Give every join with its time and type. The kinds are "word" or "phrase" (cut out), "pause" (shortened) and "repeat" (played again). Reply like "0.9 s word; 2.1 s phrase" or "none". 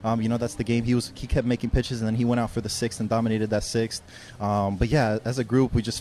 none